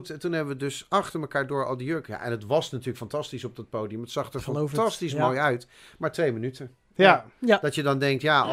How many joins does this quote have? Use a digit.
0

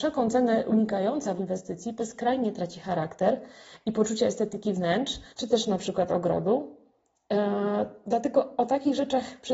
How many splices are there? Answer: 3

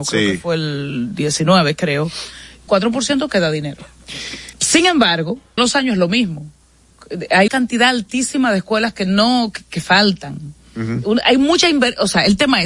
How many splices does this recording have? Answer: 4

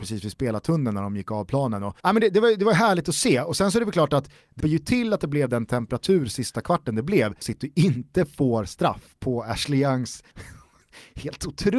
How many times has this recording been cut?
4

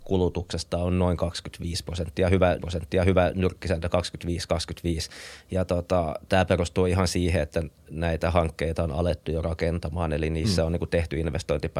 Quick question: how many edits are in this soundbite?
1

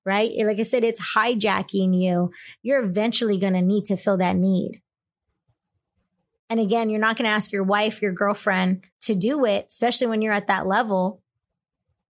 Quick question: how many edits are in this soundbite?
1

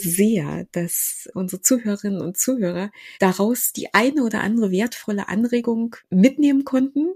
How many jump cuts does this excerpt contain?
3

